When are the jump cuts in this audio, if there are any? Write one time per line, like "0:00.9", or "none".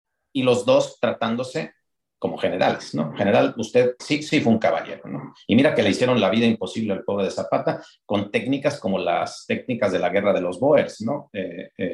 0:04.0